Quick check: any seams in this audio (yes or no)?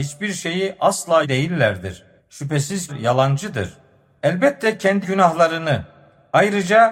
yes